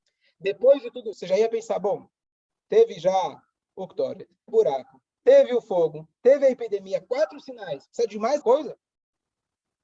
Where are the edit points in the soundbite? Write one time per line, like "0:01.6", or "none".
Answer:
0:01.1
0:04.5
0:08.4